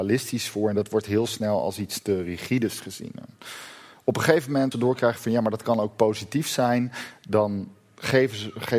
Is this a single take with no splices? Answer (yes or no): no